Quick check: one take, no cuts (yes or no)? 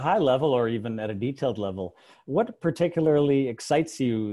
yes